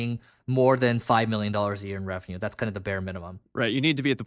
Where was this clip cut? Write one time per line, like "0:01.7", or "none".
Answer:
none

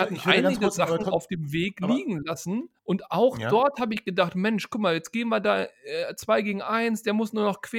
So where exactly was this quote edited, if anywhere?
0:02.8

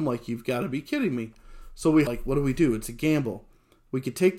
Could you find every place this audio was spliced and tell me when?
0:02.1

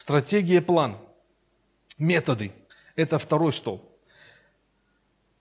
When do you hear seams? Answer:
0:02.7

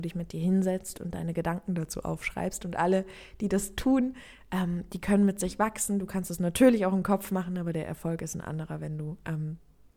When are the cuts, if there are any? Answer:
none

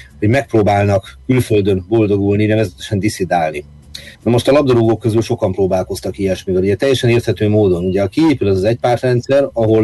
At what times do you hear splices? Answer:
0:04.1

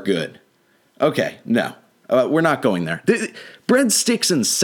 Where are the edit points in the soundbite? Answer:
none

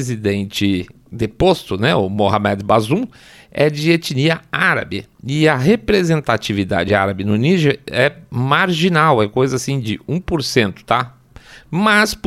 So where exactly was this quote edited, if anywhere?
none

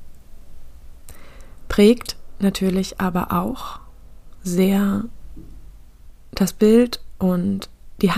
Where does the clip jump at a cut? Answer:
none

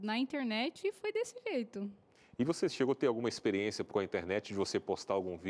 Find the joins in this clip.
0:03.9

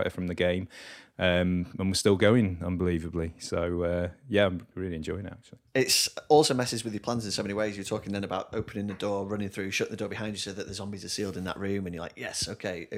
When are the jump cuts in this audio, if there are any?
0:05.7

